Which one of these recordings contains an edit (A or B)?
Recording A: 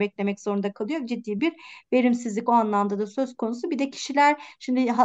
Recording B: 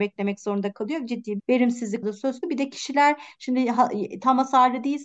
B